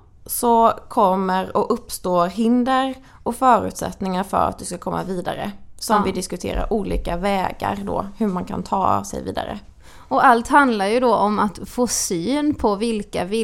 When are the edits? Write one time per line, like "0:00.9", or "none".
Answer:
none